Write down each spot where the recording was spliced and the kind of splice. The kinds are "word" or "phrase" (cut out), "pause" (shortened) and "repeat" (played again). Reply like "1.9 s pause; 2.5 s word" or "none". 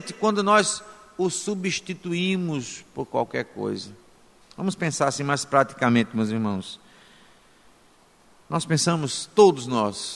none